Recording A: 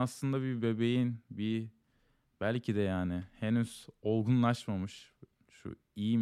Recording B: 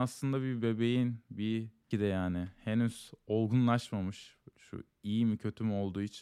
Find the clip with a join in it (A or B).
B